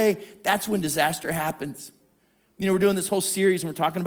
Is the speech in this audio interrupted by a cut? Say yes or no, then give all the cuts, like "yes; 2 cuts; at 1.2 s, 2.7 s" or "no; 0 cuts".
no; 0 cuts